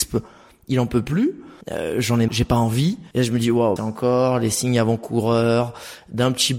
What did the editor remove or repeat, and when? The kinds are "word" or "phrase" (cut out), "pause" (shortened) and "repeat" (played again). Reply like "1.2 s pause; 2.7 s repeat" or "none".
1.6 s pause; 2.3 s word; 3.1 s pause; 3.8 s phrase